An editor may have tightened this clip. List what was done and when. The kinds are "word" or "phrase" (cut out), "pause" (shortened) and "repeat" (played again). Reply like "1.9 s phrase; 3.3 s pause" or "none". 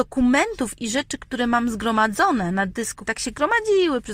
3.1 s word